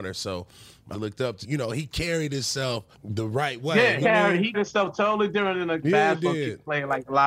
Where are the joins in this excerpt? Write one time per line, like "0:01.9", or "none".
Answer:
0:00.9
0:01.4
0:02.9
0:04.0
0:04.5
0:05.8